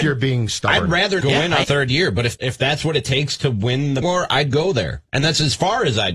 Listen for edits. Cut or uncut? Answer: cut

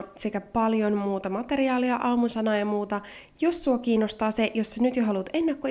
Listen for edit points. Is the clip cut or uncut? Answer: uncut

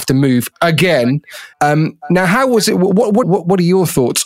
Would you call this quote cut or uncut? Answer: cut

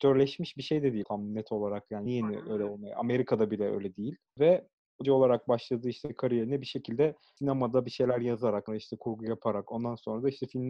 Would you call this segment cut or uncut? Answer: cut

